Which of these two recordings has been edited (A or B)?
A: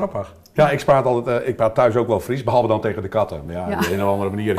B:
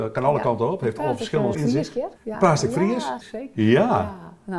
B